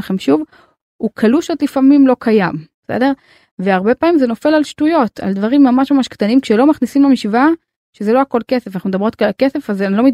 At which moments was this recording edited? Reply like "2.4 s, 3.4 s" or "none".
none